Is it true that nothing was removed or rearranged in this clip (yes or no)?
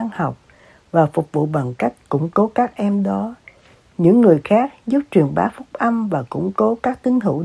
yes